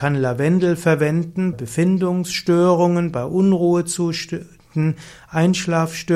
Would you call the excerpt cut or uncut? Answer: cut